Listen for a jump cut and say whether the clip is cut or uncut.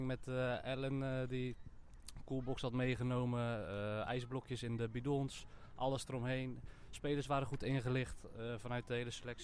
uncut